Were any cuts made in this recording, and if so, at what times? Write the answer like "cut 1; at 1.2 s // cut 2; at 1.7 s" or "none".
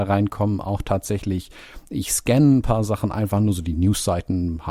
none